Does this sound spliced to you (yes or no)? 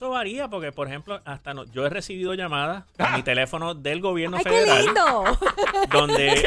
no